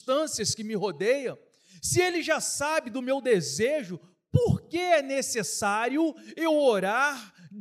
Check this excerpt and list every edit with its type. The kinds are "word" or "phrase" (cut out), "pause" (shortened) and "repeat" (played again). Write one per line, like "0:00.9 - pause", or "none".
none